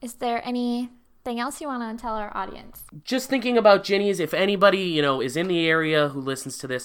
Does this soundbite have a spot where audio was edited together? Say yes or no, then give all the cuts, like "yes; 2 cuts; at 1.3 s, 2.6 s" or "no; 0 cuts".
no; 0 cuts